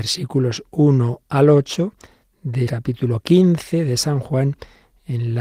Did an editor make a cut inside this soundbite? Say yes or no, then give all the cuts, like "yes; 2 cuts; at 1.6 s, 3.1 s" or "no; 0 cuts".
yes; 1 cut; at 2.7 s